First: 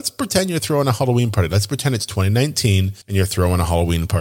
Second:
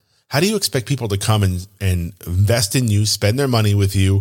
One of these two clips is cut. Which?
first; 1 cut; at 3.0 s

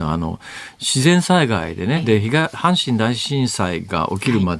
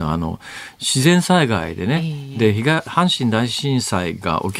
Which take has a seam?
first; 1 cut; at 2.0 s

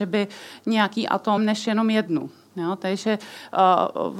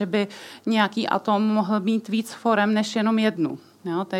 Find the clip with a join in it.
first; 1 cut; at 1.4 s

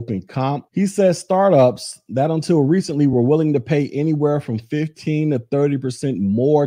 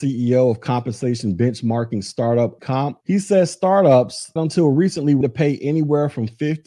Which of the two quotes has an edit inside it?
second; 3 cuts; at 2.6 s, 4.4 s, 5.2 s

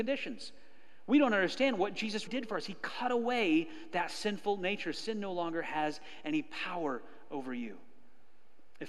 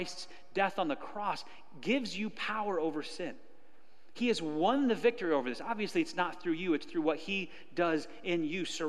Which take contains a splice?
first; 2 cuts; at 2.3 s, 4.9 s

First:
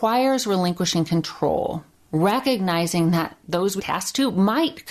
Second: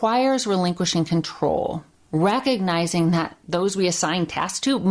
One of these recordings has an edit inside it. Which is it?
first; 1 cut; at 3.8 s

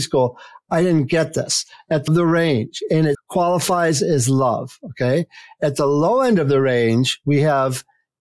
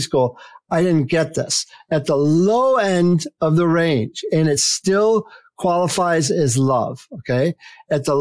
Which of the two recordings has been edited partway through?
first; 2 cuts; at 2.1 s, 3.1 s

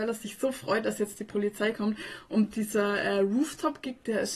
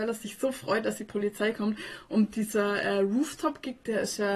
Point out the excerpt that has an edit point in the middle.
second; 1 cut; at 1.0 s

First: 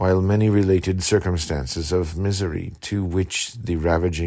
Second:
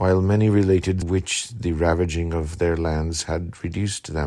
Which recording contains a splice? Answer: second; 1 cut; at 1.0 s

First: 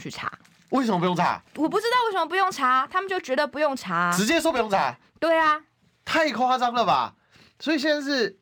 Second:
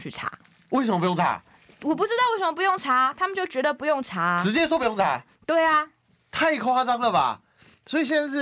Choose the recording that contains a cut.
first; 1 cut; at 1.5 s

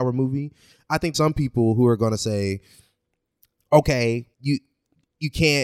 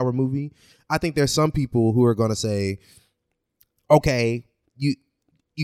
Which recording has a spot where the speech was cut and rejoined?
first; 2 cuts; at 1.1 s, 4.3 s

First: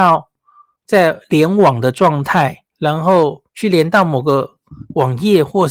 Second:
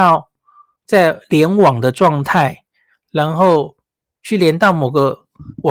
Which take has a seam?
first; 2 cuts; at 2.7 s, 3.5 s

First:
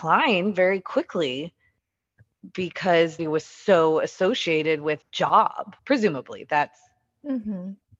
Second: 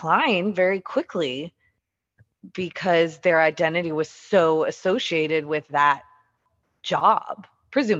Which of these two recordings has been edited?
first; 3 cuts; at 3.2 s, 5.0 s, 5.8 s

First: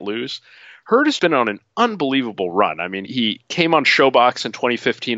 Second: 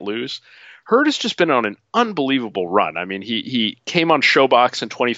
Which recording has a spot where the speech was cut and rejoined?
first; 2 cuts; at 1.2 s, 3.1 s

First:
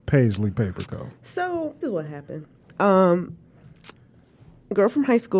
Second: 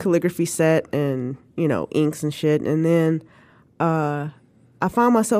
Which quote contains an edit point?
first; 1 cut; at 1.8 s

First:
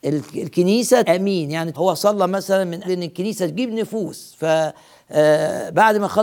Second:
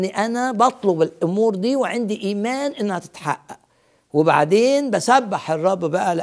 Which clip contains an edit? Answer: first; 3 cuts; at 1.0 s, 1.7 s, 2.8 s

